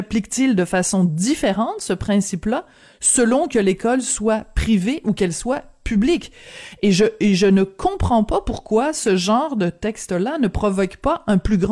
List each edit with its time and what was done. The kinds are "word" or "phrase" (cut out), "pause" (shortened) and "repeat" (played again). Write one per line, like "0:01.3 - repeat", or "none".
none